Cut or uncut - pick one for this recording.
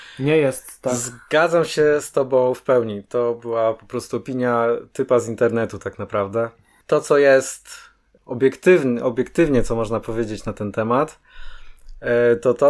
uncut